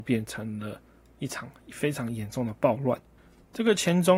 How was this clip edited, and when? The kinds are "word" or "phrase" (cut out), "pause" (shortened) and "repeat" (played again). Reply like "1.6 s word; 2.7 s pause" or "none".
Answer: none

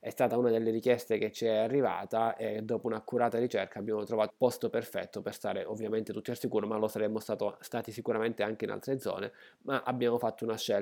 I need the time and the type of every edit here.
4.3 s word

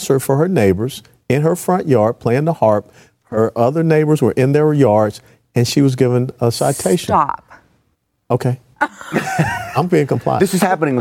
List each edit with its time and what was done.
none

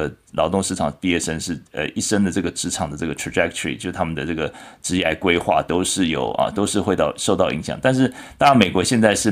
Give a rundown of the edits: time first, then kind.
none

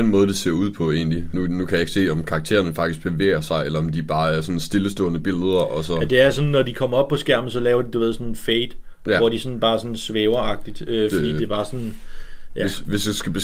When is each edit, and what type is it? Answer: 1.3 s word

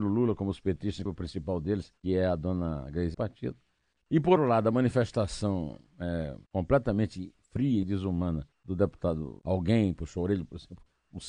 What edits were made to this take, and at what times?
1.1 s word; 2.0 s pause; 3.1 s phrase; 4.4 s word; 6.5 s pause; 7.8 s word; 8.5 s pause; 9.4 s phrase

